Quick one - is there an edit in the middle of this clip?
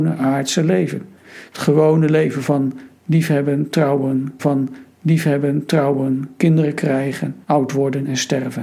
yes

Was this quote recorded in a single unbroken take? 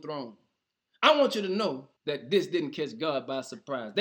no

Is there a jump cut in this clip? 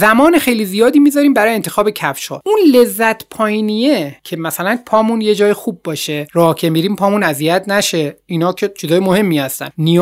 no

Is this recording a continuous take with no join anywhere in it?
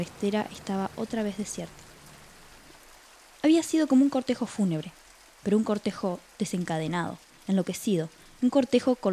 yes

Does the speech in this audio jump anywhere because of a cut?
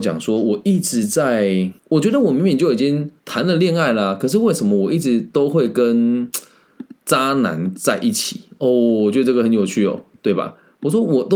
yes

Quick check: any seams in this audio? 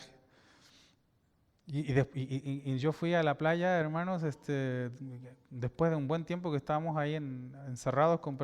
no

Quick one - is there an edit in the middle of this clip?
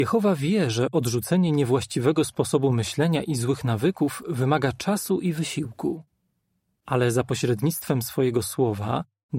no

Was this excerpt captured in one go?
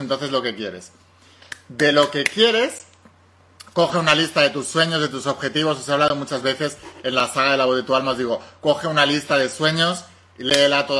yes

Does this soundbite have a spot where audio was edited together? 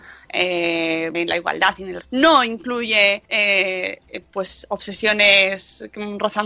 yes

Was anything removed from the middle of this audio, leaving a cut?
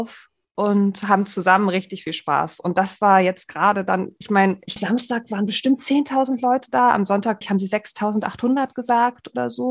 yes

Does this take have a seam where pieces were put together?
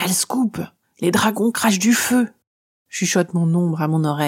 no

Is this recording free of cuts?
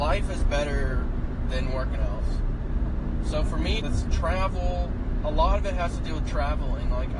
no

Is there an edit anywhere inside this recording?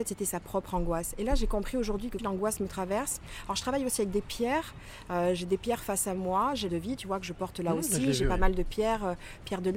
yes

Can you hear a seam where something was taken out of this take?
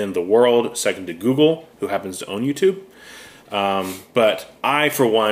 yes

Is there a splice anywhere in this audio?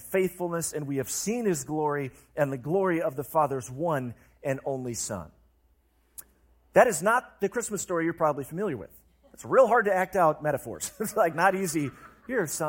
no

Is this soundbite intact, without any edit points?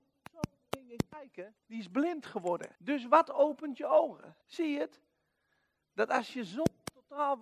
no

